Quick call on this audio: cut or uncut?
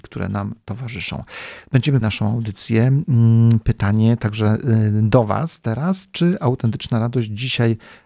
cut